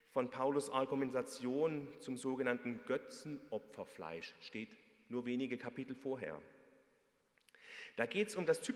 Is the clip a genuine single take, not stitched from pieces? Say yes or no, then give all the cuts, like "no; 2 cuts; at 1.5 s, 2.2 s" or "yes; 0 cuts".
yes; 0 cuts